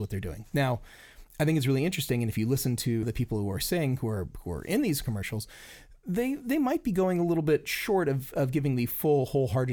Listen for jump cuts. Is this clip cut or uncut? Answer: cut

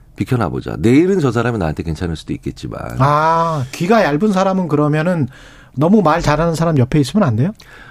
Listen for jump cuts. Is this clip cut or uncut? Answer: uncut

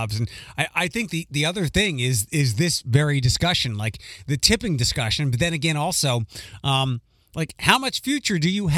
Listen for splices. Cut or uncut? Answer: uncut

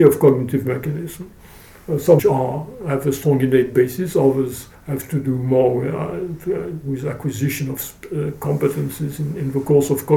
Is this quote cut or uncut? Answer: cut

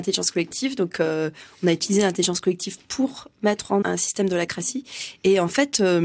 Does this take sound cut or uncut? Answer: cut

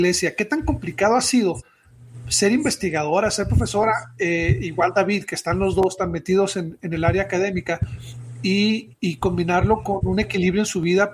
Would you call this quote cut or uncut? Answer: uncut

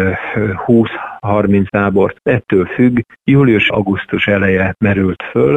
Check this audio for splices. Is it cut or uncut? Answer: cut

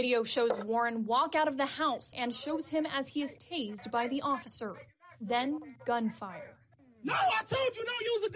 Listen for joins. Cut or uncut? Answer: uncut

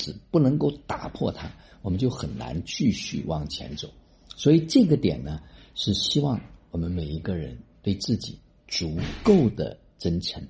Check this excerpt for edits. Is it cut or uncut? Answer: uncut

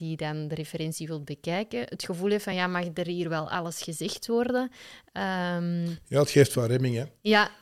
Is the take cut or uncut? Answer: uncut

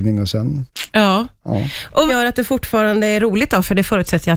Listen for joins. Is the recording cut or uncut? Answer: cut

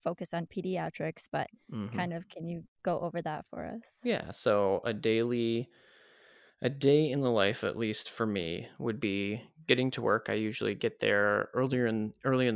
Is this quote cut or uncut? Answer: uncut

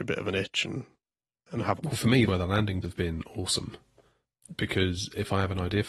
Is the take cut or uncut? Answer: cut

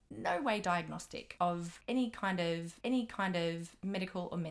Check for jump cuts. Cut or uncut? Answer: cut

